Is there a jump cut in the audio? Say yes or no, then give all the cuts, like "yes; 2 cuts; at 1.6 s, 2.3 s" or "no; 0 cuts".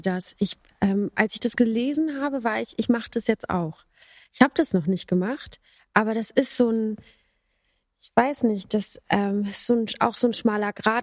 no; 0 cuts